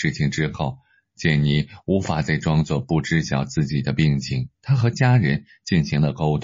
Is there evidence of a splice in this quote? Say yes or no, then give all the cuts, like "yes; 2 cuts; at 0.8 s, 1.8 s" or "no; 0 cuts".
yes; 1 cut; at 4.5 s